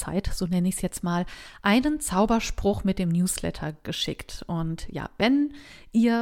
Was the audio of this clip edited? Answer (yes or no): no